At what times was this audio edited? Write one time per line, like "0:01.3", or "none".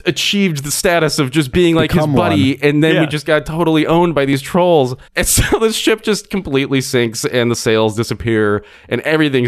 0:05.1